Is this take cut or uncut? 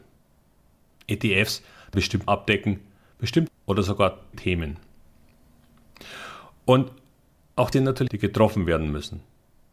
cut